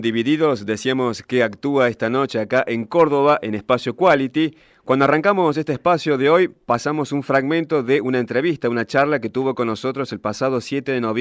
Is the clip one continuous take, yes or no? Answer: yes